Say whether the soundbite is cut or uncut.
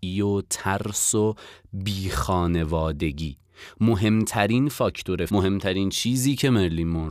cut